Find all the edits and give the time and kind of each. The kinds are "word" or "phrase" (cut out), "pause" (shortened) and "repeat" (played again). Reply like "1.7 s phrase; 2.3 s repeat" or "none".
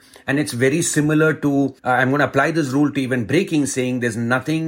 1.8 s pause

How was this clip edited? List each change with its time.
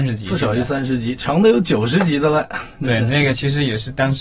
none

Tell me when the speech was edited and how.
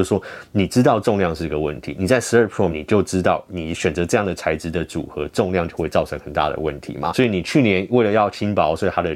2.7 s phrase

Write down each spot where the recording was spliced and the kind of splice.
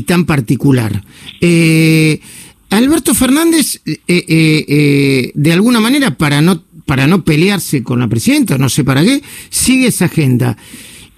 none

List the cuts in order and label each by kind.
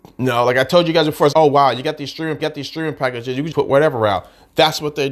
1.3 s word; 2.4 s repeat; 3.5 s word

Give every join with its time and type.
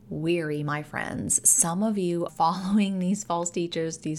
2.3 s word

